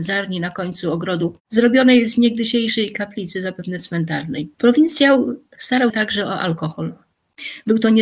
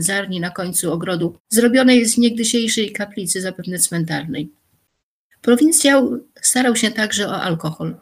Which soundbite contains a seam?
first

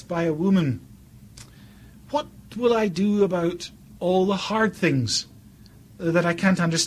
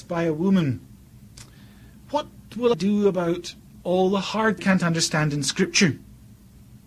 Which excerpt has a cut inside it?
second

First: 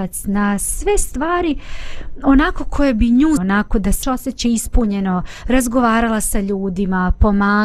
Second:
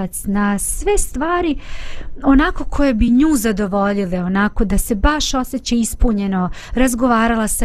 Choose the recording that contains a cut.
first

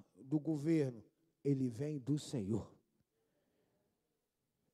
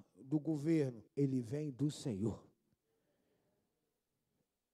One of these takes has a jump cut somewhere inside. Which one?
second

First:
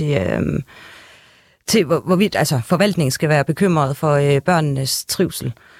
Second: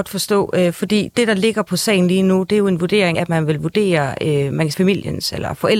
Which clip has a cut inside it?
second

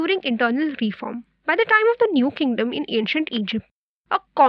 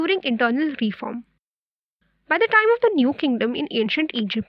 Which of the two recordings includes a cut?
first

